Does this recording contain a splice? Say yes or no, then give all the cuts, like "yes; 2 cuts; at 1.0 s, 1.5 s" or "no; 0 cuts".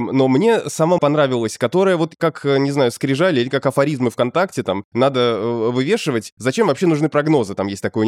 yes; 1 cut; at 1.0 s